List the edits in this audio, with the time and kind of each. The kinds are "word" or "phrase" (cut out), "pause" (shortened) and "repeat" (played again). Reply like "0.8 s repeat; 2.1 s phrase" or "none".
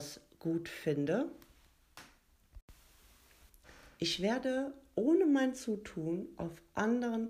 none